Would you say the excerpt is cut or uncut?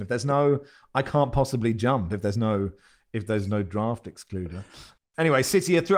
uncut